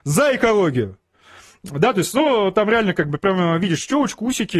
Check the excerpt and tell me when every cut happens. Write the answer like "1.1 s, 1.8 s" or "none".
none

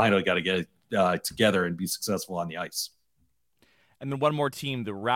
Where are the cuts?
none

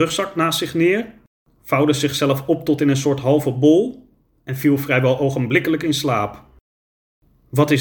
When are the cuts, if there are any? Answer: none

